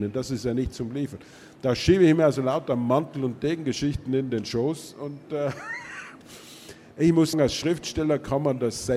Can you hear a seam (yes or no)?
yes